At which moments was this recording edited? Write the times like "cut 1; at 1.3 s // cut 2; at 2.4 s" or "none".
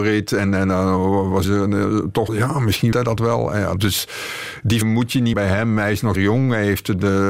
cut 1; at 1.4 s // cut 2; at 2.3 s // cut 3; at 2.9 s // cut 4; at 3.8 s // cut 5; at 4.8 s // cut 6; at 5.3 s // cut 7; at 6.2 s